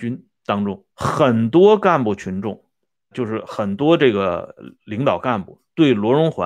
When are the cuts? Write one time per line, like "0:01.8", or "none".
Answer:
0:00.9
0:03.1
0:04.7

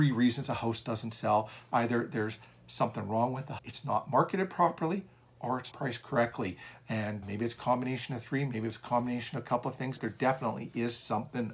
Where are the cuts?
0:03.6
0:05.7
0:07.2
0:10.0

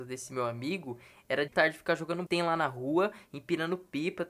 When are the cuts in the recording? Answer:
0:01.5
0:02.3

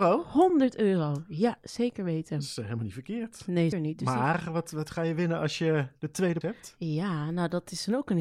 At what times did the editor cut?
0:03.7
0:06.4

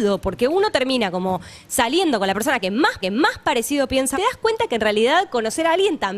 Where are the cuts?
0:03.0
0:04.1

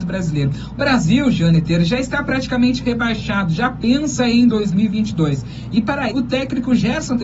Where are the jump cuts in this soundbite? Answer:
0:06.1

